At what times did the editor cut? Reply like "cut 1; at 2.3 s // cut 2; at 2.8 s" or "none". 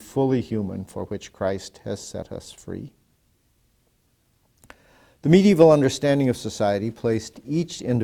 none